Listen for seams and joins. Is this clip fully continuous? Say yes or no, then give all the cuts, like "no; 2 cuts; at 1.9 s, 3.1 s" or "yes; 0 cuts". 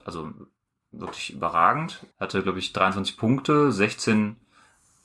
no; 1 cut; at 2.1 s